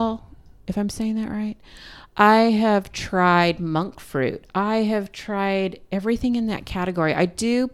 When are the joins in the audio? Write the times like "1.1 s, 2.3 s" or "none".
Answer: none